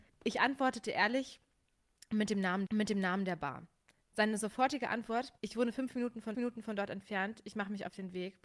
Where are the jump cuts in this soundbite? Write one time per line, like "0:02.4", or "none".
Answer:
0:02.7
0:05.4
0:06.3